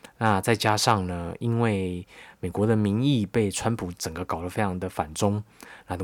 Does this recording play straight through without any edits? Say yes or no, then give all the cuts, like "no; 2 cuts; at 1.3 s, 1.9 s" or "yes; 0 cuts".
yes; 0 cuts